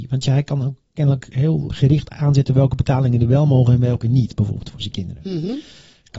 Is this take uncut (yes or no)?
no